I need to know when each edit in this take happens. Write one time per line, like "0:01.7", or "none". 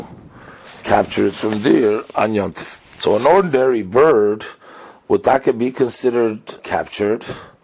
0:06.6